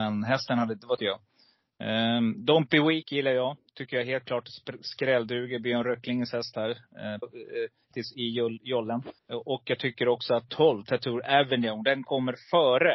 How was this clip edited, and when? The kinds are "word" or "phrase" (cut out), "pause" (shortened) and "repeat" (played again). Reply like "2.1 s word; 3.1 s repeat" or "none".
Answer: 1.0 s phrase; 7.2 s phrase; 7.9 s word; 9.2 s pause; 10.5 s word